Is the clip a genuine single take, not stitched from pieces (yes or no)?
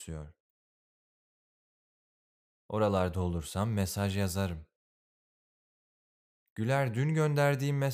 yes